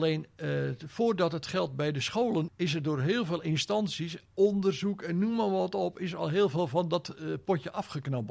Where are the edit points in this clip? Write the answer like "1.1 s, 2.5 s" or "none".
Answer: 2.5 s